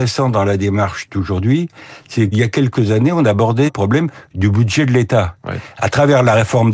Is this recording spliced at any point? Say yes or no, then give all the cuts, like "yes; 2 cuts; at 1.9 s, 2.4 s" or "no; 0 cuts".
yes; 2 cuts; at 2.3 s, 3.7 s